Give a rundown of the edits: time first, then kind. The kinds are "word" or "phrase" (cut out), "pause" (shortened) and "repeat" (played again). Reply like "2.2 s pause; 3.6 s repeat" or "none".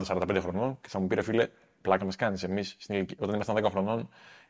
none